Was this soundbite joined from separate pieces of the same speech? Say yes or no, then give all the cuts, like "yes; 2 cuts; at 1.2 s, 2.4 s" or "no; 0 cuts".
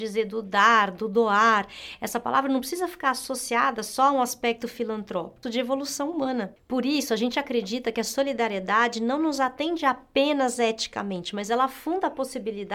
yes; 1 cut; at 5.4 s